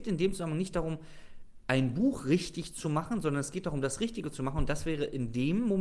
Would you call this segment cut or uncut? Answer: uncut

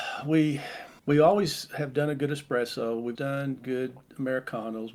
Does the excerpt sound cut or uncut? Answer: cut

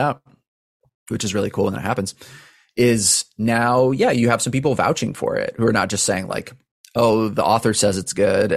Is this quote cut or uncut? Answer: uncut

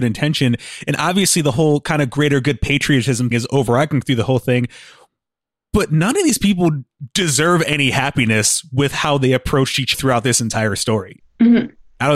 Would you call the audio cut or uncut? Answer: cut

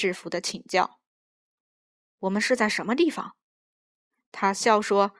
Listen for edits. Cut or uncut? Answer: uncut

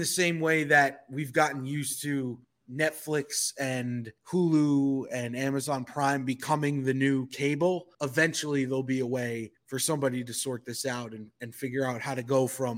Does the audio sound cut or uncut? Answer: cut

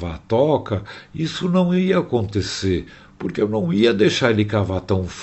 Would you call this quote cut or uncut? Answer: uncut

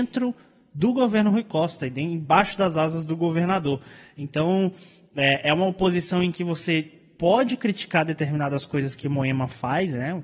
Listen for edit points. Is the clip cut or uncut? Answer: uncut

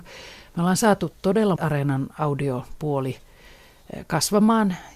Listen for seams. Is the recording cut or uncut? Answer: cut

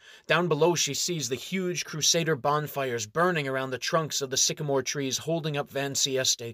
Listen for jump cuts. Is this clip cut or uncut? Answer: uncut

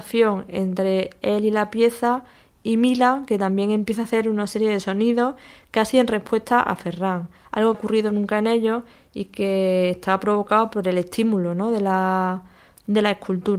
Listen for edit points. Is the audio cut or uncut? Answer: cut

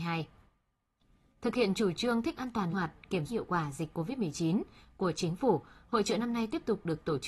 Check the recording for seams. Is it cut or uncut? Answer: cut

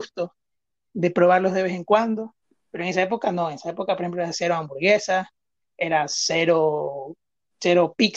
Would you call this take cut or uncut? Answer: uncut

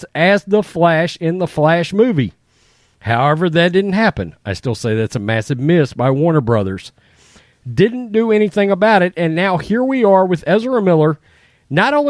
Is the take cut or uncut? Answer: uncut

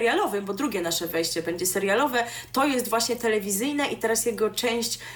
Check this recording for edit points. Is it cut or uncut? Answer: uncut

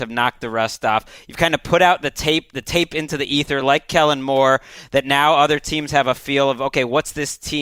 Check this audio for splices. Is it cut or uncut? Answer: uncut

